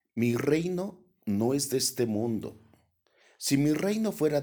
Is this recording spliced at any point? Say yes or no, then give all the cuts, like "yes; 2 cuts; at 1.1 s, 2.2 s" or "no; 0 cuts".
no; 0 cuts